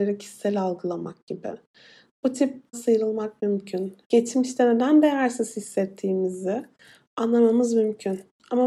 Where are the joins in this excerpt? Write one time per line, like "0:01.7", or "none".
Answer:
0:02.7
0:04.0